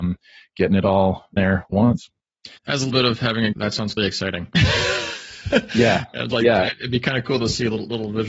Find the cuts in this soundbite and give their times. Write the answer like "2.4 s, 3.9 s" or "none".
1.4 s, 1.7 s, 2.6 s, 2.9 s, 3.5 s, 4.0 s